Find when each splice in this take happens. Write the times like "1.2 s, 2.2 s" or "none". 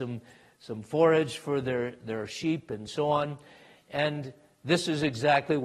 none